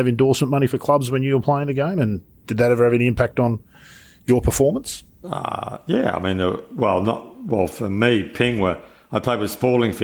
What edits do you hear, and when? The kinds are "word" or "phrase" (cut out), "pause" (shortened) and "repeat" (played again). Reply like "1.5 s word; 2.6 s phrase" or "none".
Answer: none